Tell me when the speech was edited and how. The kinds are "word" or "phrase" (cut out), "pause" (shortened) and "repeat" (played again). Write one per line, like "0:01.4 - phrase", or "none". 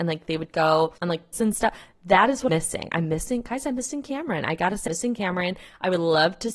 0:01.0 - pause
0:01.3 - word
0:02.5 - word
0:04.9 - word